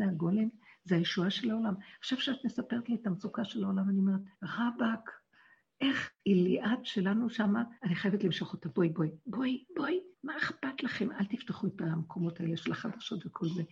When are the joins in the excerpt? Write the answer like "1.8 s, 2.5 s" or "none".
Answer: 4.3 s, 6.2 s, 7.8 s, 10.1 s